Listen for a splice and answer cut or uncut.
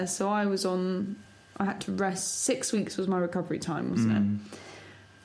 uncut